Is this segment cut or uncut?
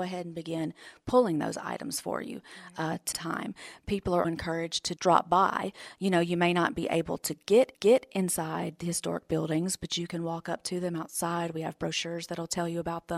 cut